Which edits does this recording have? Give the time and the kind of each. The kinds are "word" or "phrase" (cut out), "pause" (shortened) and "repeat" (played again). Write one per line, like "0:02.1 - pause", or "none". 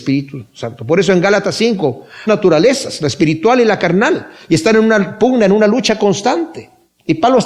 0:02.3 - phrase